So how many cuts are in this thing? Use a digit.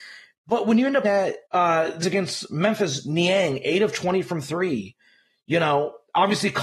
3